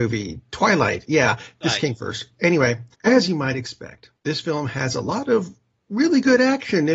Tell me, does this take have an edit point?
yes; 2 cuts; at 2.9 s, 4.2 s

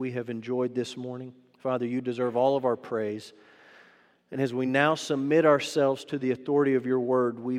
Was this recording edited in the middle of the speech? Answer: no; 0 cuts

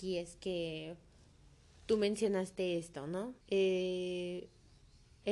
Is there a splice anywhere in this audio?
yes; 1 cut; at 3.4 s

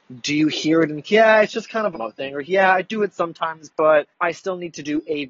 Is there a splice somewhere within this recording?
yes; 3 cuts; at 1.0 s, 1.9 s, 4.1 s

